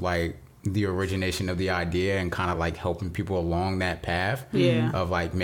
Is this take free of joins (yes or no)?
yes